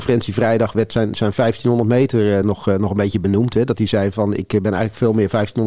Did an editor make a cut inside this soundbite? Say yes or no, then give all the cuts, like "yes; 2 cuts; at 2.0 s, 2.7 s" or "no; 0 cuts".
no; 0 cuts